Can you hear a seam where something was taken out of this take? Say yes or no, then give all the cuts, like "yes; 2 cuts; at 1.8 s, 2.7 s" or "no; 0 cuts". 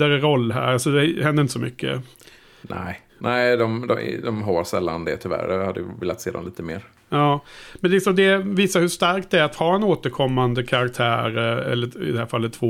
yes; 2 cuts; at 3.1 s, 7.0 s